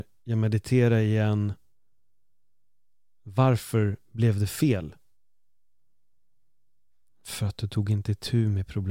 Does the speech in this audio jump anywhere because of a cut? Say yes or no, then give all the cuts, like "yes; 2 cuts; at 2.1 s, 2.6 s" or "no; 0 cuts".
no; 0 cuts